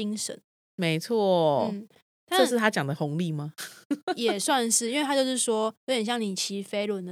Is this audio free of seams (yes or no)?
yes